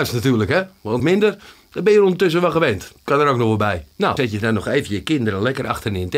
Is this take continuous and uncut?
no; 2 cuts; at 1.0 s, 4.2 s

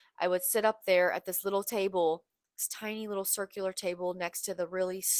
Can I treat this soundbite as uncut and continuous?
yes; 0 cuts

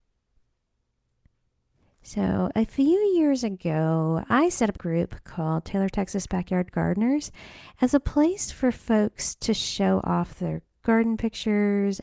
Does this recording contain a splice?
yes; 1 cut; at 4.7 s

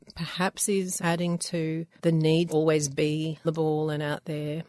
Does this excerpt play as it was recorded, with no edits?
no; 3 cuts; at 1.0 s, 2.5 s, 3.4 s

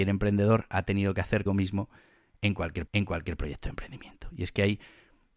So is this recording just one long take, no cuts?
no; 2 cuts; at 1.5 s, 2.9 s

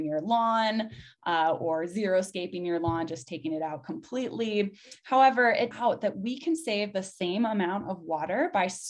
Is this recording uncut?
no; 1 cut; at 5.7 s

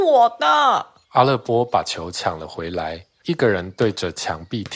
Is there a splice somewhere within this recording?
yes; 2 cuts; at 1.0 s, 3.2 s

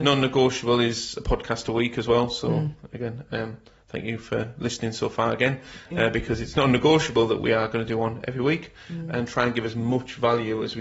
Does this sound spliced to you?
no; 0 cuts

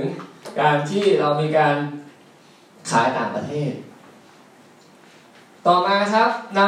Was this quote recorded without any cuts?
yes; 0 cuts

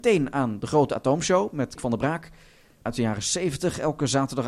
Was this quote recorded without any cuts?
no; 2 cuts; at 1.8 s, 2.9 s

